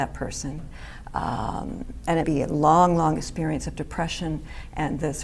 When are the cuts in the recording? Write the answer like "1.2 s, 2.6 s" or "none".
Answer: 2.2 s